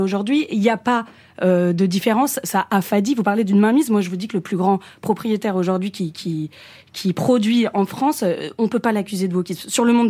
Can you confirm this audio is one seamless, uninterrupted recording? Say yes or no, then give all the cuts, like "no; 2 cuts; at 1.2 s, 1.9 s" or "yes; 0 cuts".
yes; 0 cuts